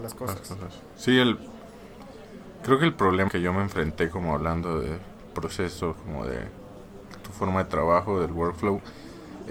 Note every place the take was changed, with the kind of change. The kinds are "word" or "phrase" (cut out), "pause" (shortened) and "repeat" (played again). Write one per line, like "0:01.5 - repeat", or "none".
0:03.3 - word
0:05.9 - word